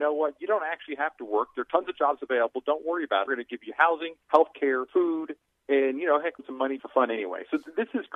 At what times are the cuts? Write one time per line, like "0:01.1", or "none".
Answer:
0:03.3
0:04.2
0:04.9
0:06.4
0:06.8